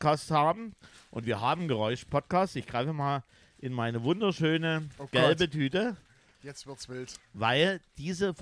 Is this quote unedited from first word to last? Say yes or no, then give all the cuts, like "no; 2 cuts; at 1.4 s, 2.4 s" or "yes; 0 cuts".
yes; 0 cuts